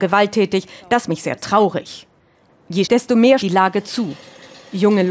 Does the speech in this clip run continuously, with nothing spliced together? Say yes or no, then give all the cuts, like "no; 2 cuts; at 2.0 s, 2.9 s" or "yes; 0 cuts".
no; 3 cuts; at 1.1 s, 2.8 s, 3.4 s